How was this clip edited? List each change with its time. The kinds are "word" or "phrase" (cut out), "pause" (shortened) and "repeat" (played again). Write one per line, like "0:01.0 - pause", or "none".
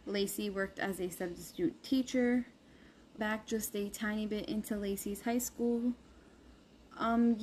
0:03.2 - word